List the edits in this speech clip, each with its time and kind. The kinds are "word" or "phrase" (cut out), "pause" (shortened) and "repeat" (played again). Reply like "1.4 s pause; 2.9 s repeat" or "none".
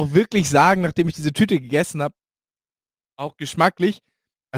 none